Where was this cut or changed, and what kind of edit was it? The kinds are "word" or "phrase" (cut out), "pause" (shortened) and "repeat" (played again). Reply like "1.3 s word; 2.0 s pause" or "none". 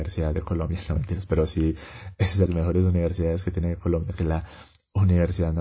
2.5 s word